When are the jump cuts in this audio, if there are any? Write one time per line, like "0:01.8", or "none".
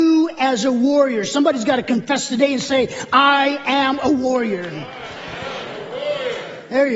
none